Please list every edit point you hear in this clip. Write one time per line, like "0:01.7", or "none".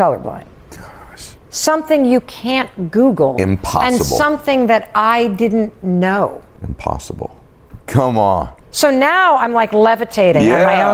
0:01.4
0:07.8
0:08.6